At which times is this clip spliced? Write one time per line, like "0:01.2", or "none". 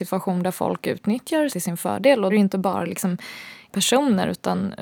0:01.5
0:02.3
0:03.7

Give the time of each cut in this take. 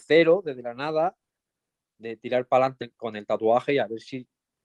0:02.8

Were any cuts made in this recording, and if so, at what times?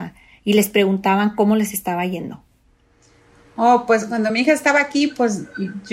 none

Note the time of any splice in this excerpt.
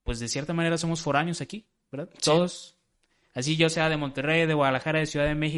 none

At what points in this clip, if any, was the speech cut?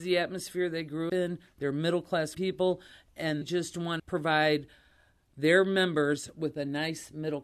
0:01.1
0:02.3
0:03.4
0:04.0

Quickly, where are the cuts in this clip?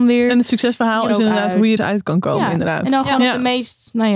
0:01.1
0:01.8

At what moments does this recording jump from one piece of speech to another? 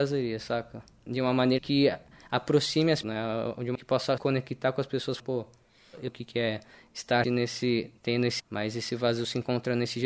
0:01.6
0:03.0
0:03.7
0:04.2
0:05.2
0:06.1
0:07.2
0:08.4

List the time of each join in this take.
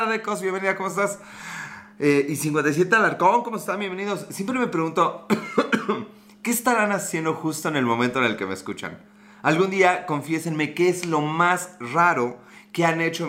none

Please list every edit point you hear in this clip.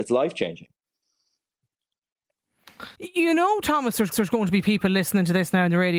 0:02.9
0:04.1

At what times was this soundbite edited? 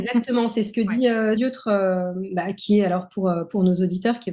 0:01.4

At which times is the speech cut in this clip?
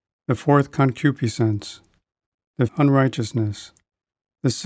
0:02.7

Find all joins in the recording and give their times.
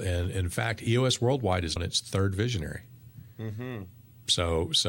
0:01.8

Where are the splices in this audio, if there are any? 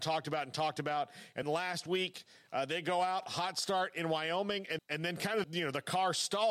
0:01.4
0:04.8
0:05.4

